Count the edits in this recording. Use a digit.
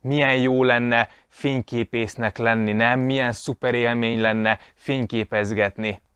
0